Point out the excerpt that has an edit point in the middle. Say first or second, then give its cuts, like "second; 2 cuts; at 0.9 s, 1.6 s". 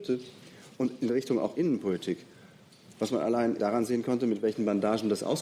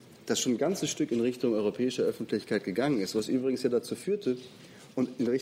first; 2 cuts; at 1.5 s, 3.6 s